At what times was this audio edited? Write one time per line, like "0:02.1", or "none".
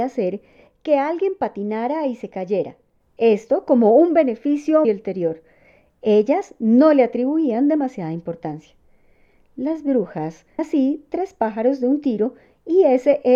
0:04.8
0:10.6